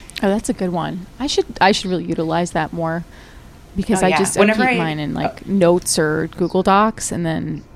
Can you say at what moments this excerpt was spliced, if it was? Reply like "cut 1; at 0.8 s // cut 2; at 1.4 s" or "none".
none